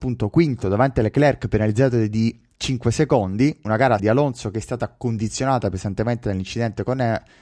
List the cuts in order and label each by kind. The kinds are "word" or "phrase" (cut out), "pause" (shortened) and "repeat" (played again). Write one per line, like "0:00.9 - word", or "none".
0:04.0 - word